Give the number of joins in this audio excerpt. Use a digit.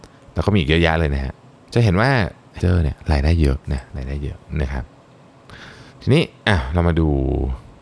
4